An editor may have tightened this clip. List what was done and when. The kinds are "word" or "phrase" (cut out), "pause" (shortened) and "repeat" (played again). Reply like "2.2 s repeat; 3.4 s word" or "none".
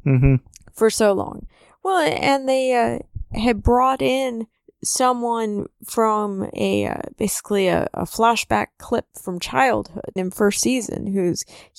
10.2 s phrase